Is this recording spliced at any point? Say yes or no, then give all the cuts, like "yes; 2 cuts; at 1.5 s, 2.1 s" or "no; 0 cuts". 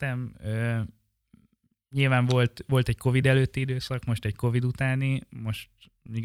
no; 0 cuts